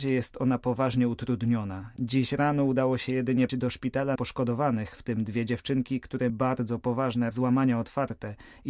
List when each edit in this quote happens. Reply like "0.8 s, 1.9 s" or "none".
3.5 s, 4.2 s, 6.3 s, 7.3 s